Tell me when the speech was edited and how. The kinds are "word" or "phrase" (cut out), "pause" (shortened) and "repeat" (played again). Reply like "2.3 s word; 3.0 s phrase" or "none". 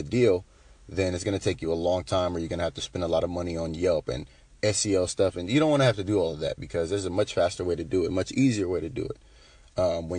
none